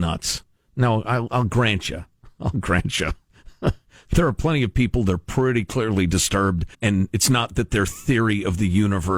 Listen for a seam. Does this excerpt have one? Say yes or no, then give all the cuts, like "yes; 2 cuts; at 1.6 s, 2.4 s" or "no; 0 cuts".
yes; 1 cut; at 6.7 s